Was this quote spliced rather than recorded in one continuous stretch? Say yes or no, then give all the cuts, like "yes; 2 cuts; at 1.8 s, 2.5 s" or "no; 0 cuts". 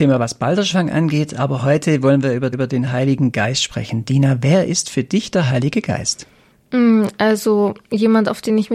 yes; 2 cuts; at 2.5 s, 7.8 s